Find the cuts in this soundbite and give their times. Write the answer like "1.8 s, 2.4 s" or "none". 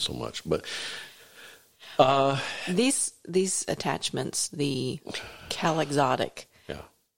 none